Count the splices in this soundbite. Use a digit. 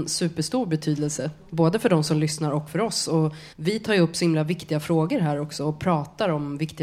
1